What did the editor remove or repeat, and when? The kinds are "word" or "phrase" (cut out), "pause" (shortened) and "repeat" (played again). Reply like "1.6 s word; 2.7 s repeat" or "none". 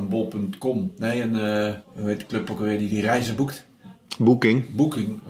1.8 s pause